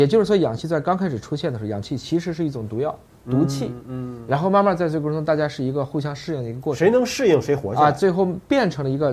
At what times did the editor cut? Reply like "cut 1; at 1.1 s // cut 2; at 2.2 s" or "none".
none